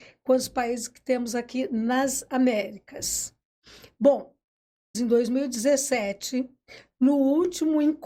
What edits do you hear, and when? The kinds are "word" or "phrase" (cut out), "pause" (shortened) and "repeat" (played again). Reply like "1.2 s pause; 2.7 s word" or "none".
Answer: 4.9 s phrase